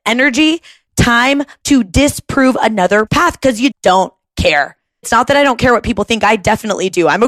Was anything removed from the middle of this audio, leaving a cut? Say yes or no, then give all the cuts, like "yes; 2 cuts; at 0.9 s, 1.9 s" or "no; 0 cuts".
yes; 4 cuts; at 1.6 s, 3.1 s, 3.7 s, 5.0 s